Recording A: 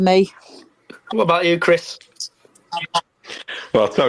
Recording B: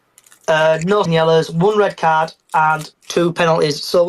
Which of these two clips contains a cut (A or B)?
B